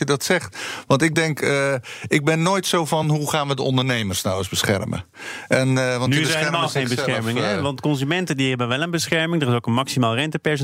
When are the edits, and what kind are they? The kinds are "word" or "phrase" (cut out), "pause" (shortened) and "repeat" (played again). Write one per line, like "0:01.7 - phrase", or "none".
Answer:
none